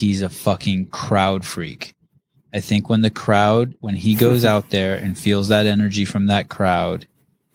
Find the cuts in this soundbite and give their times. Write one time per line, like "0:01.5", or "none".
none